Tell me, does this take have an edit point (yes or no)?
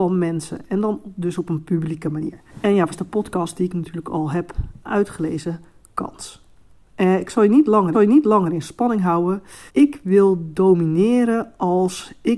yes